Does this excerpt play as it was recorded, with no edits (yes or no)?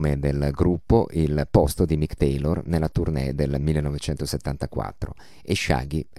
yes